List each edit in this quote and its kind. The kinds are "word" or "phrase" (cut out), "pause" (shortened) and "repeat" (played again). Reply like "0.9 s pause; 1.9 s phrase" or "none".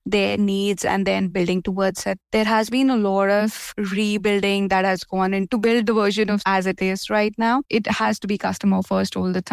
6.4 s word